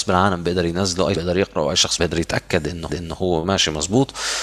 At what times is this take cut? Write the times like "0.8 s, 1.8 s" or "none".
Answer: 1.1 s, 2.0 s, 2.9 s